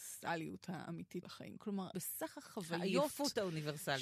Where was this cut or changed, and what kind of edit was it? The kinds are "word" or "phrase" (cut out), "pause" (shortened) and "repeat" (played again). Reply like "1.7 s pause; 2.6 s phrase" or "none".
1.2 s word; 1.9 s word